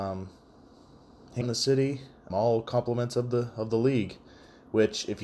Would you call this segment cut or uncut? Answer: cut